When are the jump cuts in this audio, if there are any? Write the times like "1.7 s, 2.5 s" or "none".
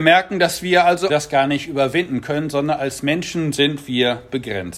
1.1 s